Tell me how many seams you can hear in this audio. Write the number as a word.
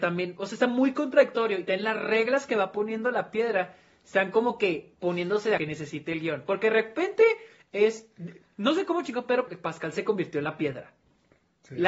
two